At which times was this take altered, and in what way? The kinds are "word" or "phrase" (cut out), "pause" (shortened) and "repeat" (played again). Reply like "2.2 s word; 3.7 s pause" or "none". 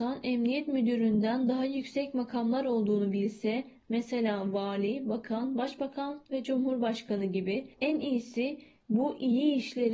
7.7 s pause